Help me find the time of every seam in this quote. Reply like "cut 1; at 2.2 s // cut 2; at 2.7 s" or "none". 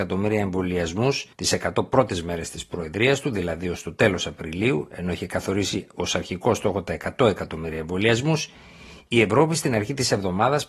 cut 1; at 1.3 s

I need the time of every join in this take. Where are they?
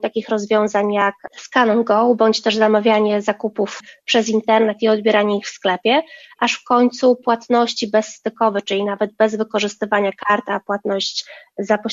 none

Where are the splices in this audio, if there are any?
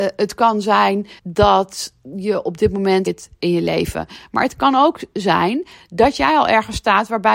cut 1; at 1.2 s // cut 2; at 3.1 s // cut 3; at 3.4 s

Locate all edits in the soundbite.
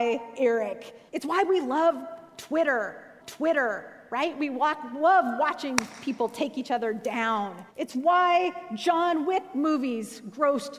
cut 1; at 1.1 s // cut 2; at 3.2 s // cut 3; at 7.7 s

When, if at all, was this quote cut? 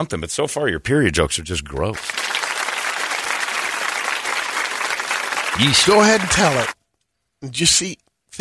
none

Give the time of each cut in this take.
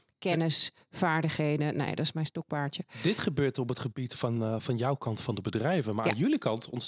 none

